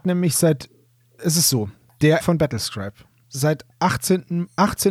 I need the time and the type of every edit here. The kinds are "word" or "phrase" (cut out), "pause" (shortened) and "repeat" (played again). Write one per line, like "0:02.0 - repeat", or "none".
0:01.2 - word
0:02.2 - word
0:03.2 - word